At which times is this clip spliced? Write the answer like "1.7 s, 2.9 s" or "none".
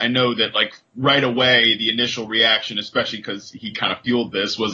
none